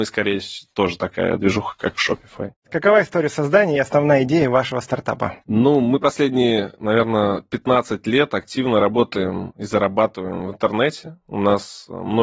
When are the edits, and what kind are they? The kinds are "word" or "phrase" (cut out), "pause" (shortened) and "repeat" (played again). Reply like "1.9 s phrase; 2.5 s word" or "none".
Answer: 2.6 s pause